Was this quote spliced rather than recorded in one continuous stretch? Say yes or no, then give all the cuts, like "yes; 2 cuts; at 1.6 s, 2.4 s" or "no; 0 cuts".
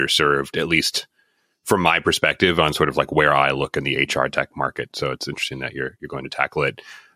no; 0 cuts